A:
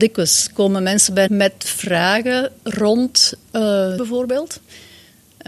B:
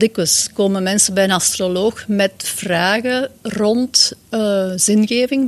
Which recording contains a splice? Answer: A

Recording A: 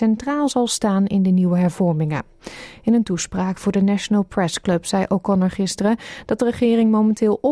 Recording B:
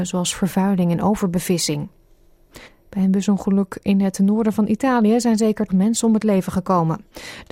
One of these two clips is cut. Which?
B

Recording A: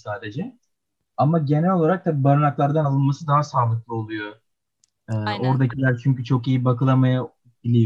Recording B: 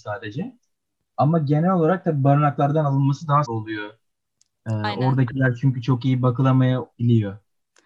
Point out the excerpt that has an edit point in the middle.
B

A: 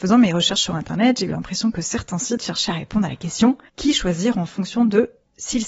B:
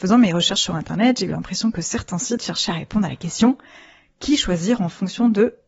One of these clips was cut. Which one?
A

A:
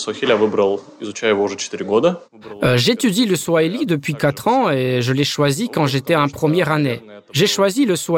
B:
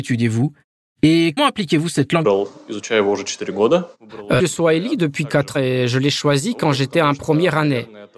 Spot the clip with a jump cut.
B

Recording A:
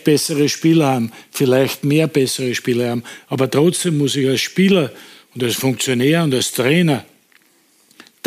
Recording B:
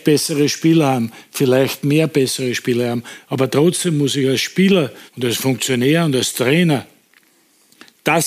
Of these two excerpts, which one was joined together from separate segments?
B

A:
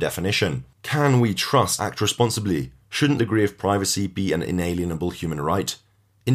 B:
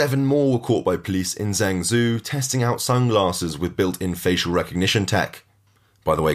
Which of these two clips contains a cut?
A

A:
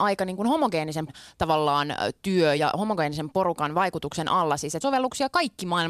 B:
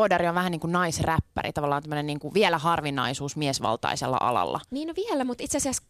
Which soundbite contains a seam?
A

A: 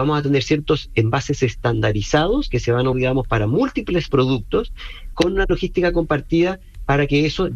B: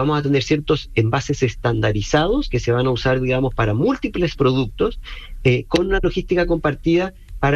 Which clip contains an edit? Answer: A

